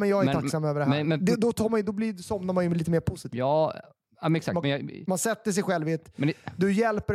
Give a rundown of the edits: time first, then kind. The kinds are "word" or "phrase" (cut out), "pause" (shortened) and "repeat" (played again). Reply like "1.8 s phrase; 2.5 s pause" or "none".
none